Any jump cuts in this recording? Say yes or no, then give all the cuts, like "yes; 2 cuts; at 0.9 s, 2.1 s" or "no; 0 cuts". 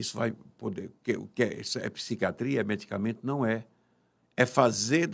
no; 0 cuts